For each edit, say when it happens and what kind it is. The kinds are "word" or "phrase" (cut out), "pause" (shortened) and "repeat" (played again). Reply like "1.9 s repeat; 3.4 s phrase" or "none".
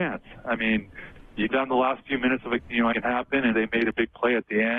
1.5 s word; 2.6 s word; 2.9 s word; 3.5 s word